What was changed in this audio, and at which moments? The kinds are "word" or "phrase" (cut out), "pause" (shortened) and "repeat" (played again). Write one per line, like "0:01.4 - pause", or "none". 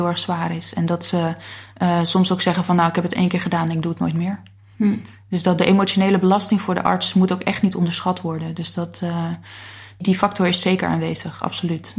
none